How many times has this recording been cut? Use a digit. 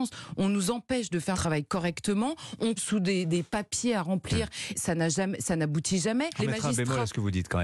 4